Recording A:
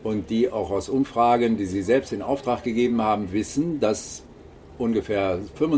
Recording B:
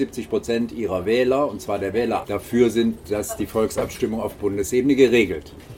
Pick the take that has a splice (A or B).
B